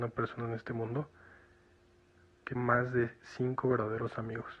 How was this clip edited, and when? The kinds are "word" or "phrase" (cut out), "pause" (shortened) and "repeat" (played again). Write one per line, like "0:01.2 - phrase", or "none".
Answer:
0:02.6 - word